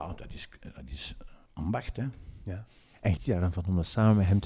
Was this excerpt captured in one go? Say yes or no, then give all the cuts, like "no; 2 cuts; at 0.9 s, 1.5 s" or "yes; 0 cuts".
no; 1 cut; at 3.2 s